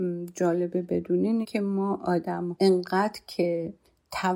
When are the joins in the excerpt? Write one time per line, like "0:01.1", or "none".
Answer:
0:01.4
0:02.5